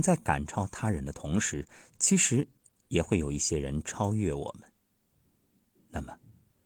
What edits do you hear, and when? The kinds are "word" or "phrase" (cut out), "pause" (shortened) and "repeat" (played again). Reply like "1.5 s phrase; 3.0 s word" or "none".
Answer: none